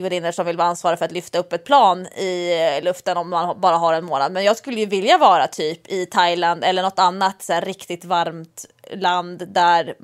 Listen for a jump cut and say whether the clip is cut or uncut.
uncut